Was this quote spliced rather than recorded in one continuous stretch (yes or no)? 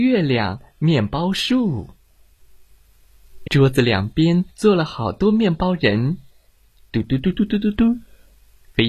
yes